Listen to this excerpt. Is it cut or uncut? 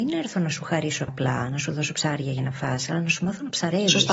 cut